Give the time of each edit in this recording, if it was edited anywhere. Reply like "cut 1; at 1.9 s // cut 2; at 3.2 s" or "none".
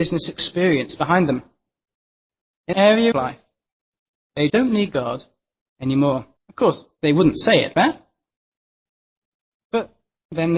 cut 1; at 2.7 s // cut 2; at 3.1 s // cut 3; at 4.5 s // cut 4; at 6.4 s // cut 5; at 7.7 s